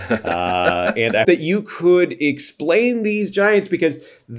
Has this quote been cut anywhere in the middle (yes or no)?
yes